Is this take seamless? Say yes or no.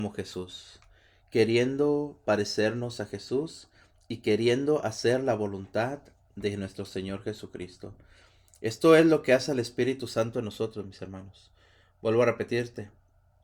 yes